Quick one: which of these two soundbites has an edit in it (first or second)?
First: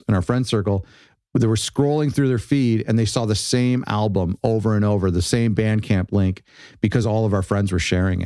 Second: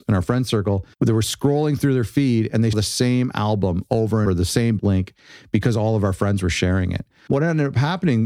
second